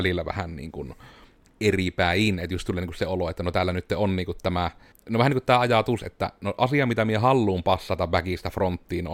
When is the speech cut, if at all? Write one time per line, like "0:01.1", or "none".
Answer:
0:01.4
0:04.9